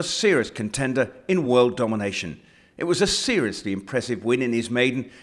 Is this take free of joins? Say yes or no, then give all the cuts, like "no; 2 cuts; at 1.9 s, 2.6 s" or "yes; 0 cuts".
yes; 0 cuts